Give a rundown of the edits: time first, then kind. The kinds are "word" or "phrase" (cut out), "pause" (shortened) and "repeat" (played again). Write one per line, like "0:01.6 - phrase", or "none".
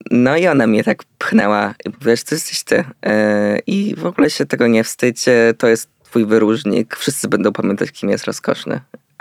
none